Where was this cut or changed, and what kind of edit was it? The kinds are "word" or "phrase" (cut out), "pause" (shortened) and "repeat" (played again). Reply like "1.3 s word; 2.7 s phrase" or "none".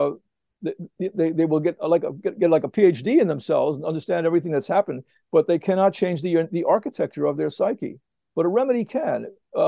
none